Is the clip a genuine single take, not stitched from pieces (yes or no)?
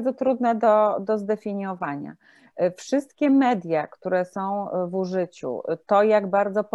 yes